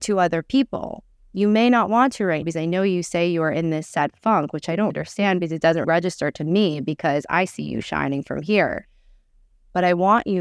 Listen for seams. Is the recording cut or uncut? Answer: cut